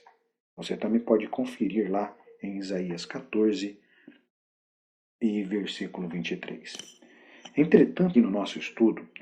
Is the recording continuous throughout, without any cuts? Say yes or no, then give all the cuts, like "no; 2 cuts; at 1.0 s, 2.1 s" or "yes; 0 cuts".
no; 1 cut; at 8.1 s